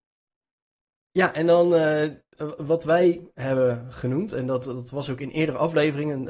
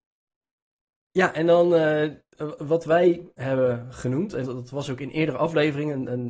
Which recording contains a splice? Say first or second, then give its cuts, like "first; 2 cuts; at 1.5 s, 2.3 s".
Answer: second; 1 cut; at 4.4 s